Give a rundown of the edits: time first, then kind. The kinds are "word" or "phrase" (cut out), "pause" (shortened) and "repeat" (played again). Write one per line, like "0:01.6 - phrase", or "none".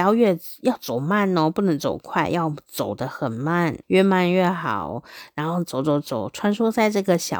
0:03.8 - pause